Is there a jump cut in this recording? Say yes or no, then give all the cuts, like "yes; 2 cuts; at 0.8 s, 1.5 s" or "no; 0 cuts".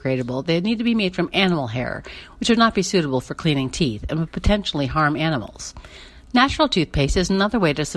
no; 0 cuts